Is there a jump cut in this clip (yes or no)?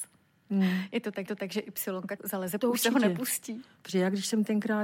yes